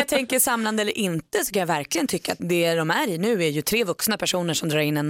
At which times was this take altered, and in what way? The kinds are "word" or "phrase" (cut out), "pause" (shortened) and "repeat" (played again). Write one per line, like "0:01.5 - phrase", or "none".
0:02.4 - word